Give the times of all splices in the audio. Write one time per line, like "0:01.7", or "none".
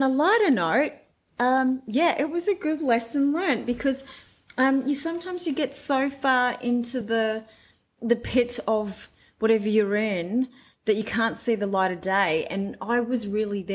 none